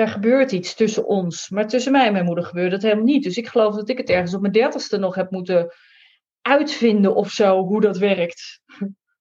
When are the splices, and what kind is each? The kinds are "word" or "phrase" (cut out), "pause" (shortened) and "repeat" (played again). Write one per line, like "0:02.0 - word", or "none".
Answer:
none